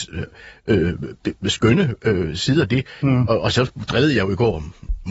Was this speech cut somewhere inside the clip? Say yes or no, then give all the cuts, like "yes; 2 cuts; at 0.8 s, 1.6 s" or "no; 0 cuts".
no; 0 cuts